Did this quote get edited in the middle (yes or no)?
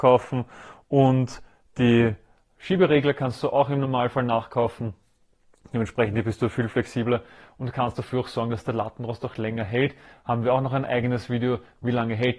no